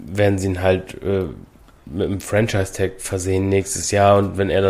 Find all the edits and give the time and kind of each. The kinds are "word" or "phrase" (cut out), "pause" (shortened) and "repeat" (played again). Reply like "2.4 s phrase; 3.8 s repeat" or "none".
none